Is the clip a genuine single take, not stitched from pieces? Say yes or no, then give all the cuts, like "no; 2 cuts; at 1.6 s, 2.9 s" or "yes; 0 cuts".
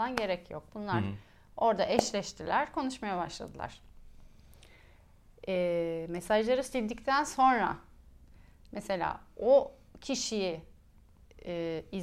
yes; 0 cuts